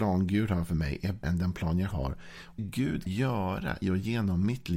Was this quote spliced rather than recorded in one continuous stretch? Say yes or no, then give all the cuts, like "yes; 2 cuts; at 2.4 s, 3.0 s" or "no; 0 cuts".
yes; 5 cuts; at 1.2 s, 1.9 s, 2.6 s, 3.1 s, 3.8 s